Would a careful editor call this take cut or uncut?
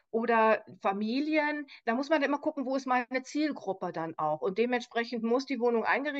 uncut